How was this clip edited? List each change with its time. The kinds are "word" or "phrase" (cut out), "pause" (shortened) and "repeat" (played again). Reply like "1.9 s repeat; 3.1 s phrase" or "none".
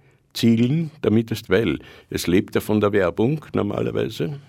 1.4 s phrase